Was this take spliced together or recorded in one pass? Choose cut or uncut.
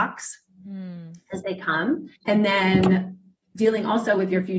cut